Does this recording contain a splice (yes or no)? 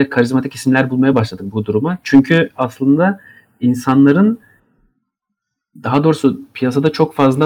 no